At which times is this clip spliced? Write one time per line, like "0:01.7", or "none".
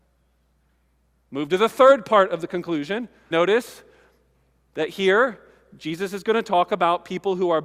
0:03.3

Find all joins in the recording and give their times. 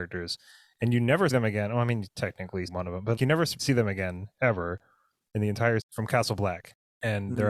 0:01.3
0:02.7
0:03.2
0:03.6
0:05.8

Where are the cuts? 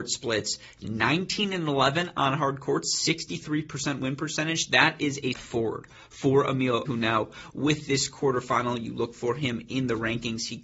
0:05.3
0:06.9

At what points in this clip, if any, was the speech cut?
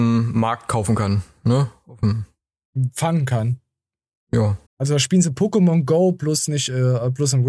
0:04.7

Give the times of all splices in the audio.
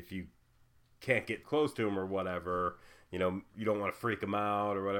0:01.4
0:03.5

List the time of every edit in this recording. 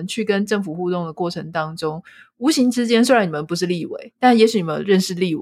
none

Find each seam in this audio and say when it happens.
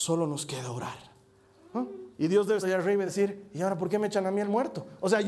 0:02.1
0:02.6
0:03.1

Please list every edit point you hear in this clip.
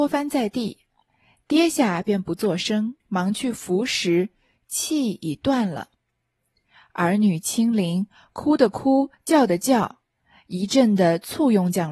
0:03.0

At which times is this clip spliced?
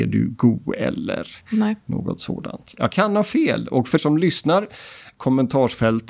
0:04.0

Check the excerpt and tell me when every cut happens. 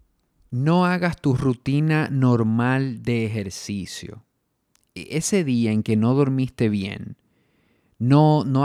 none

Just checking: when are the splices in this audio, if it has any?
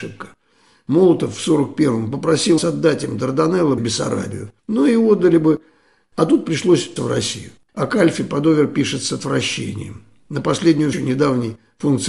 0:02.6
0:03.8
0:04.6
0:07.0
0:07.6
0:10.9

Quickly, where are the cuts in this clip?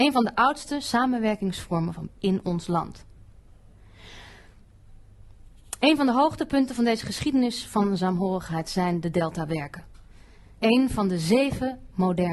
0:02.1

